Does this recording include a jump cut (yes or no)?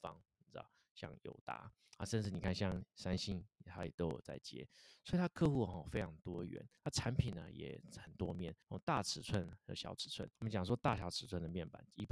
yes